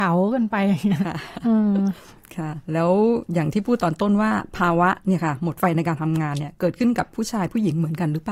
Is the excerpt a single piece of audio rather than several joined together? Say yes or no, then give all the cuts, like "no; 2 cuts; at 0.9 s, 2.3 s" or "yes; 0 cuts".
no; 1 cut; at 2.6 s